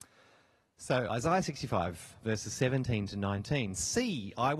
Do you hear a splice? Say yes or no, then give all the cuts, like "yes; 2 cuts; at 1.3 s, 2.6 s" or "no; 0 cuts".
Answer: no; 0 cuts